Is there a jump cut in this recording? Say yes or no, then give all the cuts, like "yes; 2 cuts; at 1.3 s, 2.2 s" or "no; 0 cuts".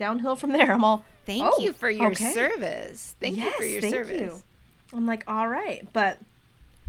no; 0 cuts